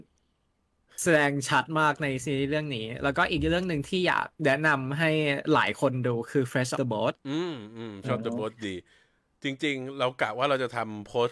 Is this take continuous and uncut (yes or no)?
no